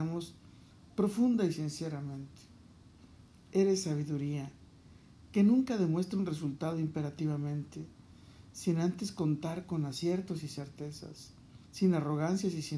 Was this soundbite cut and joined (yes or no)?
yes